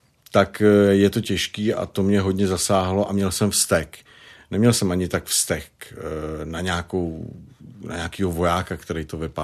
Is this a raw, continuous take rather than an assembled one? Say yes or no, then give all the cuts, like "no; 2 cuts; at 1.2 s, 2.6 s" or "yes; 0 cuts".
yes; 0 cuts